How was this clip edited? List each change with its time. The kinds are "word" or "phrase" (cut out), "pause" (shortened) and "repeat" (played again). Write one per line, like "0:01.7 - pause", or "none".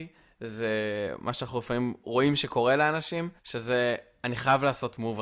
0:02.0 - word
0:03.4 - pause